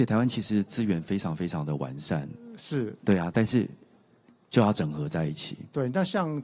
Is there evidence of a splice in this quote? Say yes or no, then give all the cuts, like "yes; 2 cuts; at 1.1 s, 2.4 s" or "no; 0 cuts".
no; 0 cuts